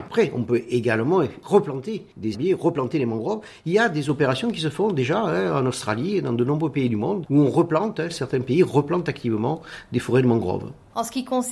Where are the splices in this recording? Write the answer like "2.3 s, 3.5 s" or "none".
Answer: 2.3 s